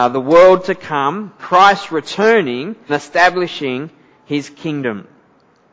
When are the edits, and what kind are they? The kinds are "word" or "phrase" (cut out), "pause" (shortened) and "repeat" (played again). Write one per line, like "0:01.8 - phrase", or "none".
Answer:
0:01.4 - word
0:02.9 - word